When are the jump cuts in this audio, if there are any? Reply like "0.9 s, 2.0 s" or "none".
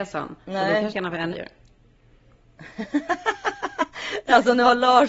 0.9 s, 1.3 s